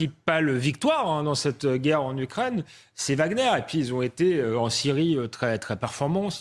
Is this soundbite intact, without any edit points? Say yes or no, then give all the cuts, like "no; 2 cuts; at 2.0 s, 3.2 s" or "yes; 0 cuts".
yes; 0 cuts